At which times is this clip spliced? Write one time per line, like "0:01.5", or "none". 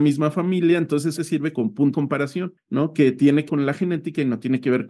0:01.2
0:01.5
0:01.9
0:03.5